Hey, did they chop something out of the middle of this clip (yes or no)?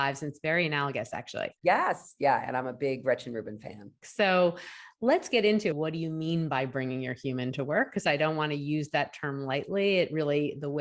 yes